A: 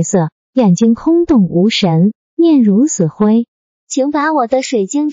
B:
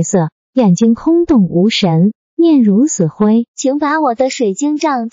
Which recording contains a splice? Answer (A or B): B